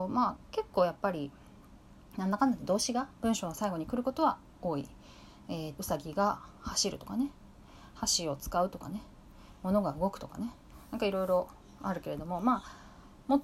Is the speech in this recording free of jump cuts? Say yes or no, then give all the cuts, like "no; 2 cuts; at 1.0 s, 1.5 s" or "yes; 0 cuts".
no; 1 cut; at 5.7 s